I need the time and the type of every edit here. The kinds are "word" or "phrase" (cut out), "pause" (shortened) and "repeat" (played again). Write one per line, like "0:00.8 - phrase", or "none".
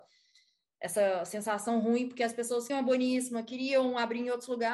0:02.7 - word